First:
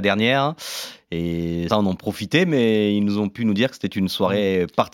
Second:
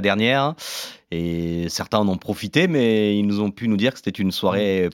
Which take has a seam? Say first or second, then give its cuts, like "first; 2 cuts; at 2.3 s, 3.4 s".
first; 1 cut; at 1.7 s